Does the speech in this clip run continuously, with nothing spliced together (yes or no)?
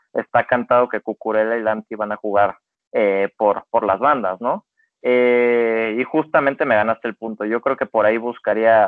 yes